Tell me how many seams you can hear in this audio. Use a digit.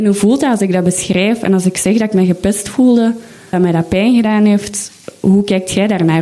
1